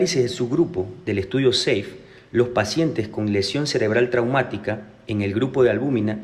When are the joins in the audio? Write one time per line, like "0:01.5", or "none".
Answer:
none